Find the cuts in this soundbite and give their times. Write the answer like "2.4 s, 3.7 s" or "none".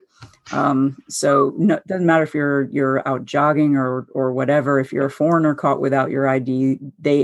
none